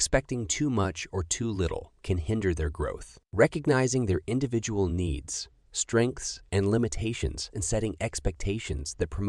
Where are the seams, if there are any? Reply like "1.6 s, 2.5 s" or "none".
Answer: 3.3 s, 7.5 s